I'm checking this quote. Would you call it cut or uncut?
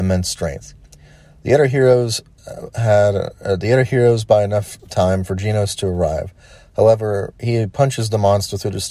uncut